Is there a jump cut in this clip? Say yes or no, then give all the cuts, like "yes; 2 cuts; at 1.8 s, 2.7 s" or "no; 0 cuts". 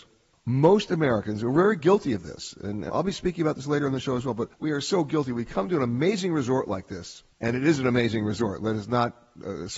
yes; 2 cuts; at 2.9 s, 4.5 s